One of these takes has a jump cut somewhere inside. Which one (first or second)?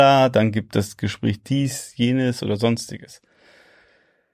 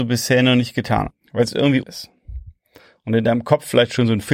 second